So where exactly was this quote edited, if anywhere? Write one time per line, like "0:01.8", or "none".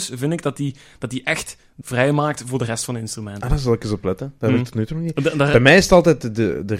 0:01.8